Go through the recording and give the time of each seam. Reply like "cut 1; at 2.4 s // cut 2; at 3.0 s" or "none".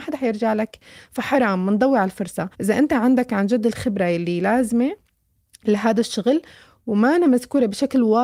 cut 1; at 2.5 s